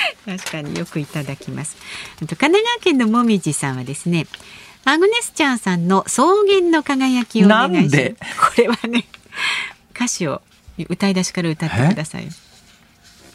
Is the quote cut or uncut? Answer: uncut